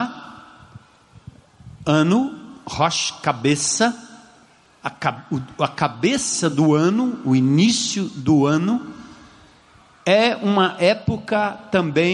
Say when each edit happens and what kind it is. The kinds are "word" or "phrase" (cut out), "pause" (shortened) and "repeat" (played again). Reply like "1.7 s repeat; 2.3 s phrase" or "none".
none